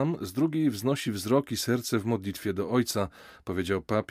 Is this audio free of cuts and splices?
yes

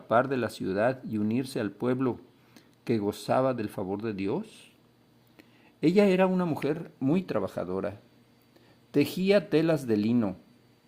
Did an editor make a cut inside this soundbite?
no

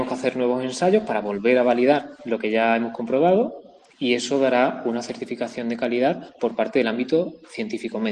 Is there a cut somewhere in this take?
no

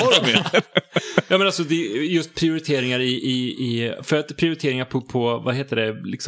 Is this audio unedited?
yes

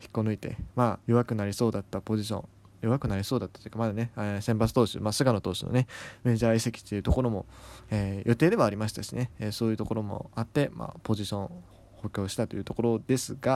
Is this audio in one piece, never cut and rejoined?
no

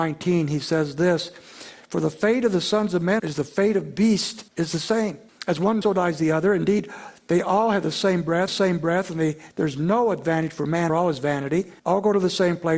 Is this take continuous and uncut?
no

